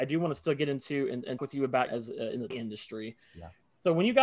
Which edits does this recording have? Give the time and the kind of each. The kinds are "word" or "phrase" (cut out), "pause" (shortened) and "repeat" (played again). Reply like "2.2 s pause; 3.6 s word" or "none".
1.4 s word; 1.9 s phrase; 2.5 s word